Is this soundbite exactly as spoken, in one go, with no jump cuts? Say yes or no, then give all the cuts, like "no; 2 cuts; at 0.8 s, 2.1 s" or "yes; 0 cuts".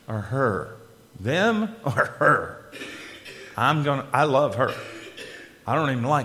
yes; 0 cuts